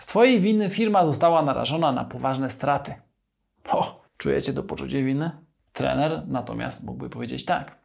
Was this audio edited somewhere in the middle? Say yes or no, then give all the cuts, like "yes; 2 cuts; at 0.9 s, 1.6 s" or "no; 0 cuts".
yes; 1 cut; at 4.1 s